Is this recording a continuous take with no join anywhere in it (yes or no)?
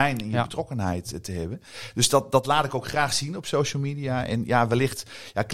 yes